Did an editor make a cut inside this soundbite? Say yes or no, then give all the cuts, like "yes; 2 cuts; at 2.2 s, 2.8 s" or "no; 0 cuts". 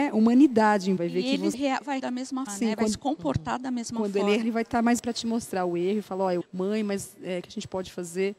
yes; 8 cuts; at 1.0 s, 1.5 s, 2.0 s, 2.5 s, 4.4 s, 5.0 s, 6.4 s, 7.4 s